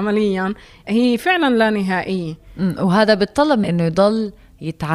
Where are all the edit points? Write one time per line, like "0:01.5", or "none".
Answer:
0:03.6